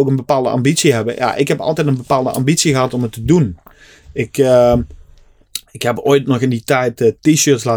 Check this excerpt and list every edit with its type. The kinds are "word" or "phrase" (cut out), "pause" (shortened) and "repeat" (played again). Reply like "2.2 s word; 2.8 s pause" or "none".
none